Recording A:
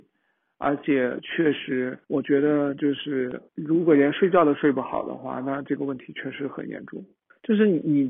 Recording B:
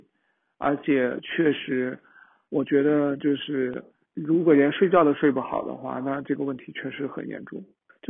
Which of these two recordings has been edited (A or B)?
A